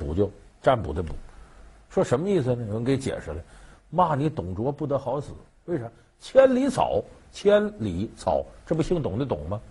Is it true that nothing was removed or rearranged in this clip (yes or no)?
yes